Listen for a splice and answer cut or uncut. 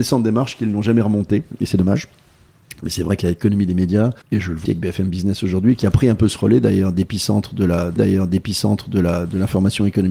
cut